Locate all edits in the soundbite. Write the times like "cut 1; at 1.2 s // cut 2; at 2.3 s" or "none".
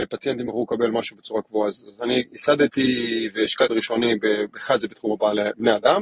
cut 1; at 3.7 s